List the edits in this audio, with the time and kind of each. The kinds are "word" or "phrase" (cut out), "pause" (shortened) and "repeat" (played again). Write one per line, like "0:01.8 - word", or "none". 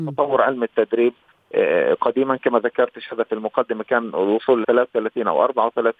0:04.6 - word